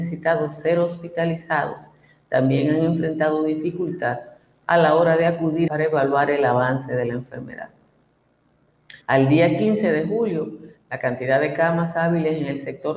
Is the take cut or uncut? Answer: cut